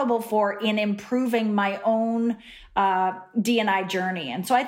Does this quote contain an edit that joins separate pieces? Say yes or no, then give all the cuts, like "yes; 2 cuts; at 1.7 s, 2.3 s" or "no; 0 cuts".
no; 0 cuts